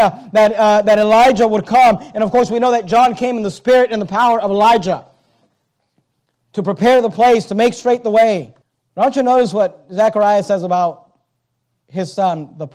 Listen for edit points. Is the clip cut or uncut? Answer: cut